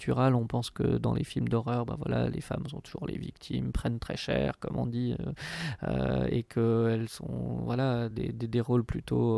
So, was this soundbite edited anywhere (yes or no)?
no